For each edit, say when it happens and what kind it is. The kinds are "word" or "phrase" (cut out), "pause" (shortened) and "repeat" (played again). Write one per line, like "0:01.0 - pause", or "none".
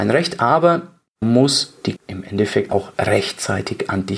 0:01.2 - word
0:02.0 - word
0:02.7 - word